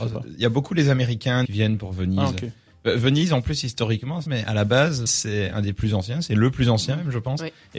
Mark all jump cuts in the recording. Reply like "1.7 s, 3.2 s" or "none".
1.4 s, 4.3 s, 5.1 s